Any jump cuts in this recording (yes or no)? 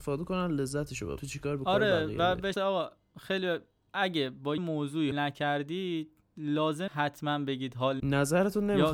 yes